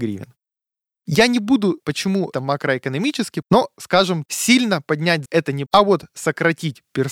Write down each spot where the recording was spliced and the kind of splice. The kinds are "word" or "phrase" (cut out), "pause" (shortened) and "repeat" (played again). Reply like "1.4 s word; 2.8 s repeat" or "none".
1.8 s word; 2.3 s word; 3.4 s word; 4.3 s word; 5.3 s word; 5.7 s word